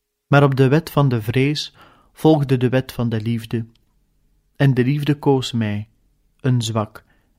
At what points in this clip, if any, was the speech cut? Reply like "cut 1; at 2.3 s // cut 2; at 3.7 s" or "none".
none